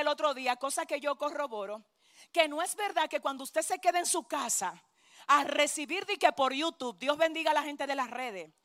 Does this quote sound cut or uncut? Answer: uncut